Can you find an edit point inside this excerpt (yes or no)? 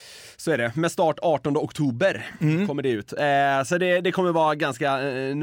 no